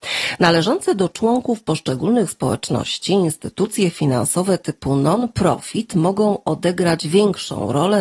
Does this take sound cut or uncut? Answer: uncut